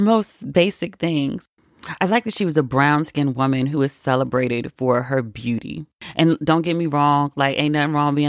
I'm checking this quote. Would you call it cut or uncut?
uncut